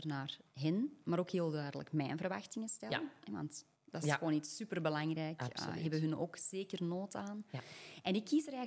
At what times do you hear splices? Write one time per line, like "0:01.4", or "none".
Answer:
0:03.8